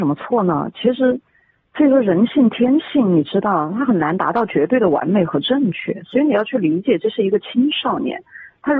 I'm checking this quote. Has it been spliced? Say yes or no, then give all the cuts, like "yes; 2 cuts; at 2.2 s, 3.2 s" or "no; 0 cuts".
no; 0 cuts